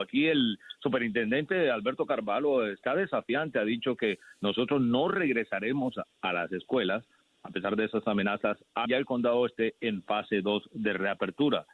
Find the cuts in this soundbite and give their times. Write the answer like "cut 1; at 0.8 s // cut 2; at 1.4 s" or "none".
cut 1; at 8.9 s

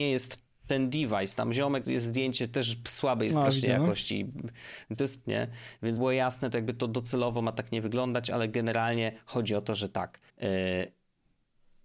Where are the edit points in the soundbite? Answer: cut 1; at 1.8 s // cut 2; at 5.2 s // cut 3; at 6.0 s // cut 4; at 10.3 s

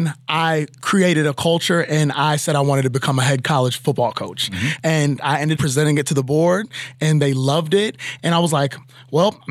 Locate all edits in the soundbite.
cut 1; at 5.6 s

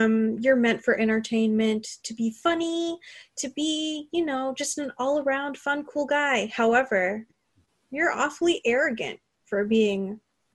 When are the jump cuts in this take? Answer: none

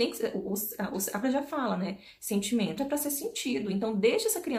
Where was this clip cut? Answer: cut 1; at 1.2 s // cut 2; at 2.8 s

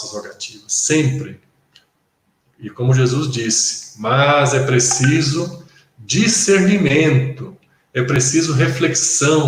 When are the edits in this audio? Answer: none

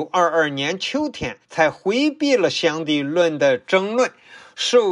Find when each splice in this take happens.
cut 1; at 1.4 s

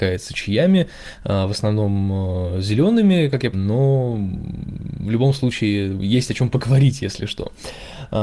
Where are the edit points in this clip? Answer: cut 1; at 3.5 s

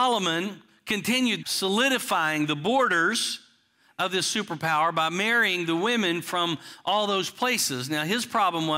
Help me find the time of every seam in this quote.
cut 1; at 1.4 s

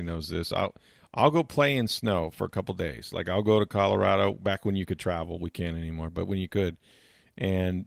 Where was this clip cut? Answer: none

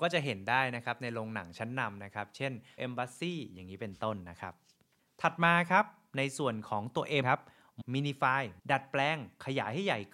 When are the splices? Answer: cut 1; at 2.8 s // cut 2; at 7.2 s // cut 3; at 7.8 s // cut 4; at 8.6 s

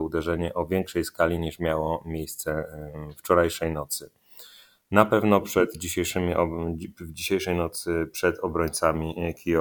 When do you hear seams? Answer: none

